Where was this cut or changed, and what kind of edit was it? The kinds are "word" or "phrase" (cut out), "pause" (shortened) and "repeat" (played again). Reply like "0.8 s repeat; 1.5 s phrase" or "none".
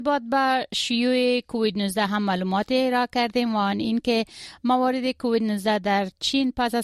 none

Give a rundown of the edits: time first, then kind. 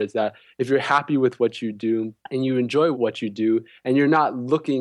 2.2 s pause; 2.9 s word

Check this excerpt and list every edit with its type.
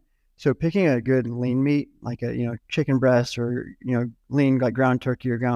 none

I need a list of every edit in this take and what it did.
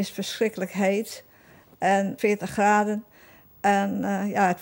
2.2 s phrase

